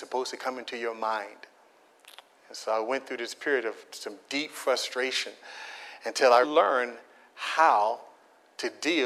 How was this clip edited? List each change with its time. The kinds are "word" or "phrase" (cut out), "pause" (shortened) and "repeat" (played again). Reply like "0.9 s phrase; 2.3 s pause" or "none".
6.4 s word